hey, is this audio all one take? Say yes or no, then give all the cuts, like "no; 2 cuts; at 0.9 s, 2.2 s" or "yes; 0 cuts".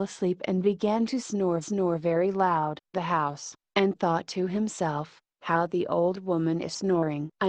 no; 2 cuts; at 1.6 s, 2.9 s